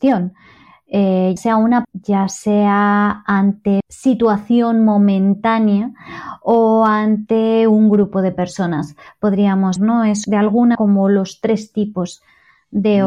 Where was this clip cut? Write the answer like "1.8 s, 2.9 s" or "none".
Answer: 1.4 s, 1.8 s, 3.8 s, 9.8 s, 10.2 s, 10.7 s